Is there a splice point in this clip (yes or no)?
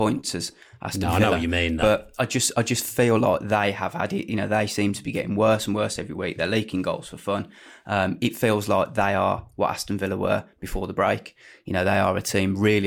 no